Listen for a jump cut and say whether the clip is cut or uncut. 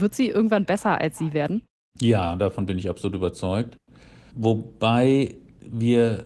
uncut